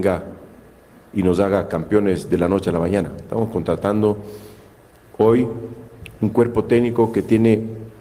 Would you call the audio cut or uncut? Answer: uncut